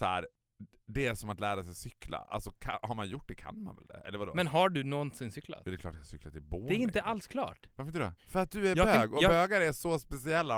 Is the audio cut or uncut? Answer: cut